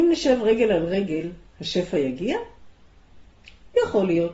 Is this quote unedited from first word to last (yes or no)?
yes